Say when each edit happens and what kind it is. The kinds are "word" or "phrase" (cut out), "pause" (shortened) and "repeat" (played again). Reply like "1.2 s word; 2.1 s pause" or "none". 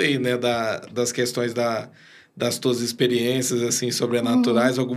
none